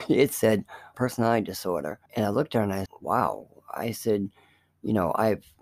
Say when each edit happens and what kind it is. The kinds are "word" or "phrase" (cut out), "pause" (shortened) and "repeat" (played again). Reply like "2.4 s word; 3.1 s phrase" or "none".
0.9 s word; 2.1 s pause; 2.9 s word